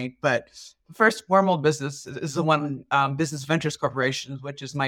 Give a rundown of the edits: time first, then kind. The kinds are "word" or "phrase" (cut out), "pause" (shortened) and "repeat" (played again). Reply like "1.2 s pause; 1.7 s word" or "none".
none